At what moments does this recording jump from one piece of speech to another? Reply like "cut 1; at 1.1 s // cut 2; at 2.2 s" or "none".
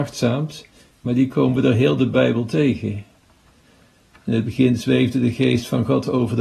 none